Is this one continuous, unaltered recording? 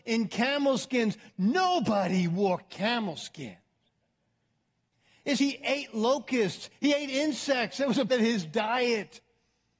no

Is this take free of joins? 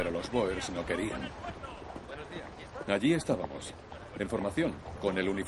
yes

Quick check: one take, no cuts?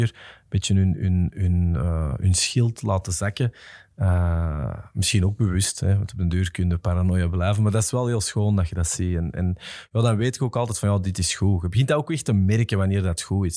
yes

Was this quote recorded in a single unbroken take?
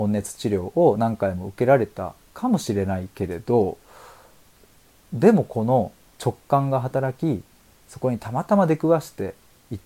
yes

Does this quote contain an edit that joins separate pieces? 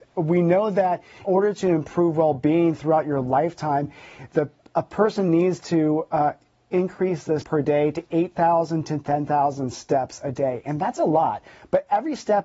yes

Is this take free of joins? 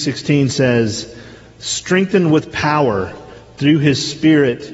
yes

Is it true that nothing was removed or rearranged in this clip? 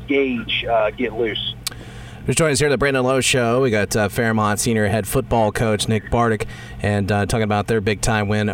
yes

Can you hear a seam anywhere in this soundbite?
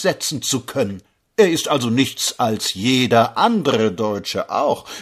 no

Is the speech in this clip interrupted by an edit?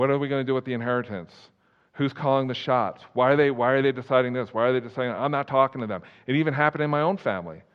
no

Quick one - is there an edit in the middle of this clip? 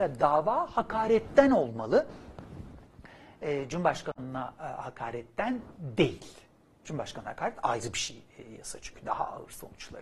no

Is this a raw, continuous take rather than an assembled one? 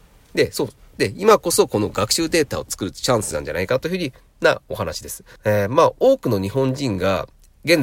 no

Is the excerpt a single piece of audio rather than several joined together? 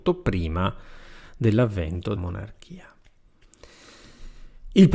no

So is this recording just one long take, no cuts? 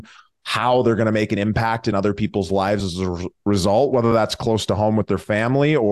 yes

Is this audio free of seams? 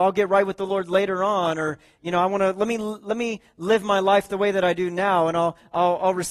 yes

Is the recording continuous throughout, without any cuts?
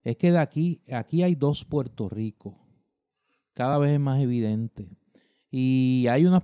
yes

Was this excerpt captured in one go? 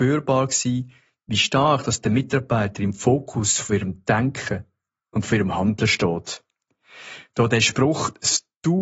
yes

